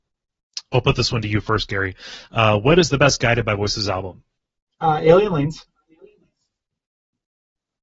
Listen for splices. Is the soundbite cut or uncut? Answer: uncut